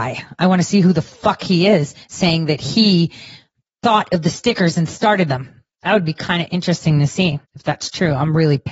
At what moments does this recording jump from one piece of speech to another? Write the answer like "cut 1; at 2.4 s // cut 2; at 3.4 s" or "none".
cut 1; at 2.0 s // cut 2; at 5.7 s // cut 3; at 7.4 s

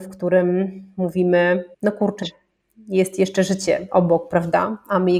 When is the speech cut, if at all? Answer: cut 1; at 1.7 s // cut 2; at 2.2 s

